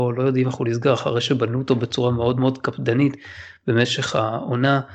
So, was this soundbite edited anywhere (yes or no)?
no